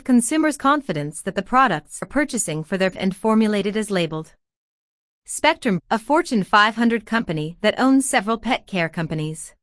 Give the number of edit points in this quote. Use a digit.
3